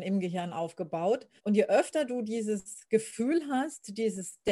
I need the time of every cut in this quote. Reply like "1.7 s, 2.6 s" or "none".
1.4 s, 2.8 s